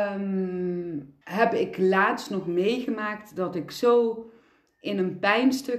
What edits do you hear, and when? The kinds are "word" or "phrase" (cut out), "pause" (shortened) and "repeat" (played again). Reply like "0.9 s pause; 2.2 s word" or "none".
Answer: 1.2 s pause